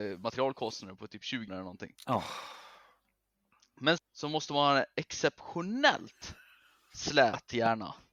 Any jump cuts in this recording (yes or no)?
yes